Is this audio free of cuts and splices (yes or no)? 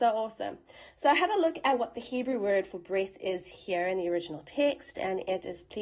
yes